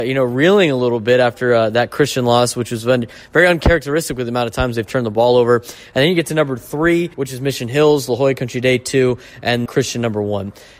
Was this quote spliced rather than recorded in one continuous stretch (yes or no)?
yes